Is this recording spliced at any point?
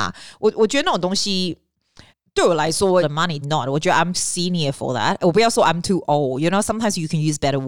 yes; 4 cuts; at 2.1 s, 3.0 s, 3.4 s, 4.1 s

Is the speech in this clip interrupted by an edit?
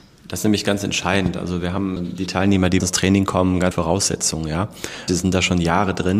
yes; 4 cuts; at 2.0 s, 2.8 s, 3.7 s, 5.1 s

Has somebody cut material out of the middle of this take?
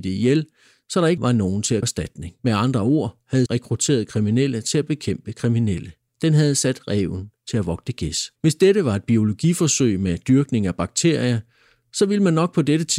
yes; 6 cuts; at 1.2 s, 1.8 s, 2.4 s, 3.5 s, 6.1 s, 8.4 s

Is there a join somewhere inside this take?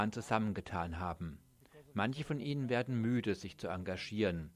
no; 0 cuts

